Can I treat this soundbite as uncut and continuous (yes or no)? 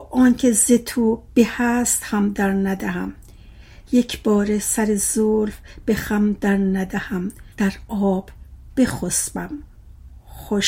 no